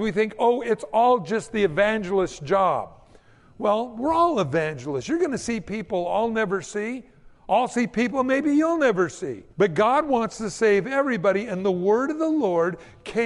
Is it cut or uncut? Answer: cut